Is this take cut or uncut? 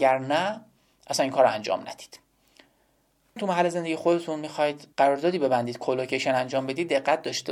cut